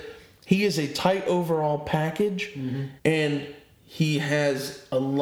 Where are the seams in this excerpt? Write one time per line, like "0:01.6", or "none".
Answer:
0:03.0